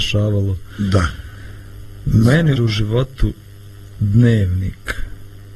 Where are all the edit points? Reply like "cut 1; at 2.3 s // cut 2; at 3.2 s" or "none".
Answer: cut 1; at 2.6 s